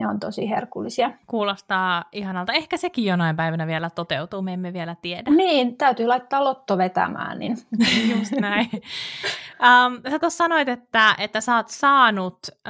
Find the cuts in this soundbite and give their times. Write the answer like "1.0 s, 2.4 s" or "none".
1.2 s